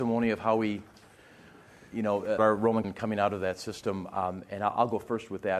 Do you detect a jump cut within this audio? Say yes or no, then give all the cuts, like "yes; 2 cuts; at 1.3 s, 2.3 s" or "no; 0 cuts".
yes; 2 cuts; at 2.4 s, 2.8 s